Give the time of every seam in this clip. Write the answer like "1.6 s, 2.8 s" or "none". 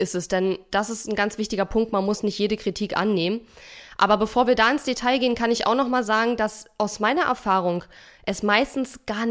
none